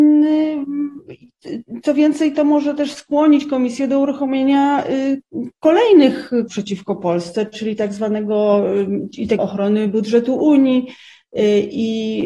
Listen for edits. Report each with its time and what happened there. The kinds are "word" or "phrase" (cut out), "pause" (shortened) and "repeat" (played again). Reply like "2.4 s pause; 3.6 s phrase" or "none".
6.5 s word; 9.4 s word